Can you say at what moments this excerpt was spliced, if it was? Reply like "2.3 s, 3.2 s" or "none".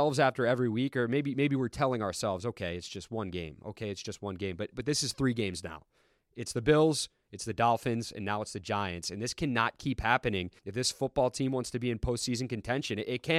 10.6 s